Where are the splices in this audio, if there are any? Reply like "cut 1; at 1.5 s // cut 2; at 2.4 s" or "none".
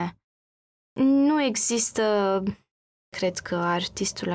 none